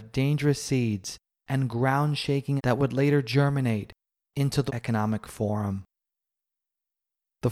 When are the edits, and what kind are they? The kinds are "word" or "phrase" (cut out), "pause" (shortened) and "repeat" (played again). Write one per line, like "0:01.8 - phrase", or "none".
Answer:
0:02.6 - word
0:04.7 - word